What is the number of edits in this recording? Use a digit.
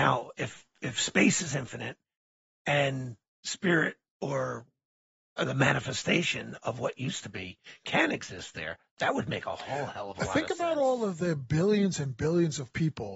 0